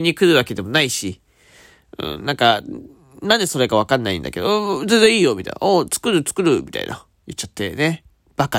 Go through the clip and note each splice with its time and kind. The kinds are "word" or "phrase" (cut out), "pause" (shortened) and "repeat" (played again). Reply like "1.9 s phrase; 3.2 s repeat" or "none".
7.2 s pause